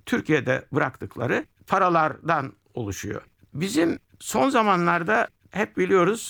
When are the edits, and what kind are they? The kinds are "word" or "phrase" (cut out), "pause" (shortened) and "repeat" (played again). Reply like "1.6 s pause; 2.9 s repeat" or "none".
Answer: none